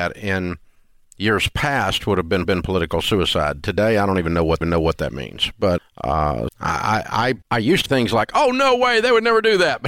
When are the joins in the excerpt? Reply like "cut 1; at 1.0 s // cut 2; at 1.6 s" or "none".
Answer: cut 1; at 2.4 s // cut 2; at 4.6 s // cut 3; at 5.8 s // cut 4; at 6.5 s // cut 5; at 7.4 s // cut 6; at 7.9 s